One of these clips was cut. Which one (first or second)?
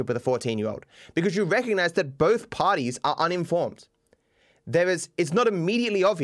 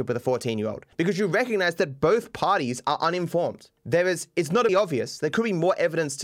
second